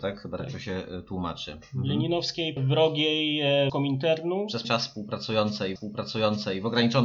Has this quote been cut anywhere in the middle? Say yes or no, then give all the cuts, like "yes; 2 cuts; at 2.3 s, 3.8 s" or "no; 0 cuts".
yes; 4 cuts; at 2.6 s, 3.7 s, 4.6 s, 5.8 s